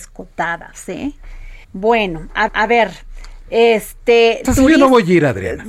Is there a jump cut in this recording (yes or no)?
yes